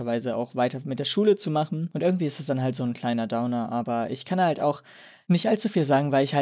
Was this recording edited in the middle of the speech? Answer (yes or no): no